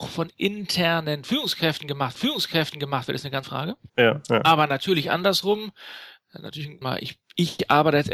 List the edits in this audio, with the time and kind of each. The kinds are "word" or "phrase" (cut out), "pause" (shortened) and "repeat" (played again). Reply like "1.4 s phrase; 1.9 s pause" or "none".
2.1 s repeat; 3.4 s word; 3.9 s pause; 6.8 s word